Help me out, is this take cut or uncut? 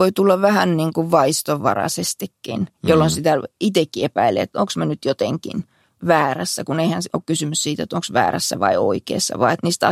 uncut